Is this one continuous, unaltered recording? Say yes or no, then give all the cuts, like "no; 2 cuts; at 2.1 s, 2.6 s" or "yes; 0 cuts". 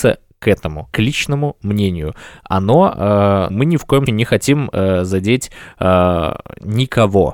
no; 3 cuts; at 0.9 s, 3.5 s, 4.1 s